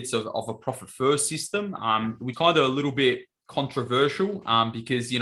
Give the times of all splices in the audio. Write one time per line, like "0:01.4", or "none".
0:02.3